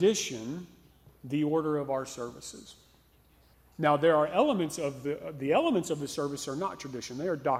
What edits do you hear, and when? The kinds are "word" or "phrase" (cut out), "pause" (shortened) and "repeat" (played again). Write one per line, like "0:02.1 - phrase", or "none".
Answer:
none